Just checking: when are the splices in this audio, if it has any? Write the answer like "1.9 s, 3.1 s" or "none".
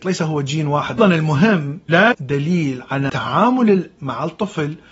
1.0 s, 2.1 s, 3.1 s, 4.0 s